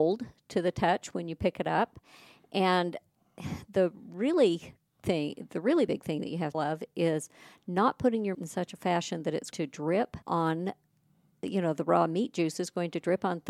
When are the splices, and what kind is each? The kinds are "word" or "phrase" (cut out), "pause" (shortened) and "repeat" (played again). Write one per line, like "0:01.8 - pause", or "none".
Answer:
0:06.5 - phrase
0:08.3 - word
0:09.5 - word
0:10.2 - pause